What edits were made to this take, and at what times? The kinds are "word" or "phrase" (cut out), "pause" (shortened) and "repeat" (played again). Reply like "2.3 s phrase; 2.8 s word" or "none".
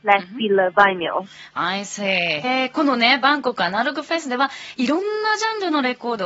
2.4 s word